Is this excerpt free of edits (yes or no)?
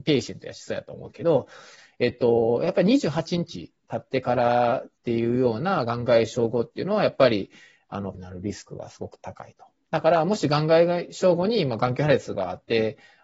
no